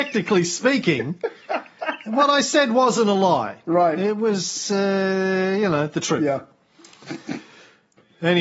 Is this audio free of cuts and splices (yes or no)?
yes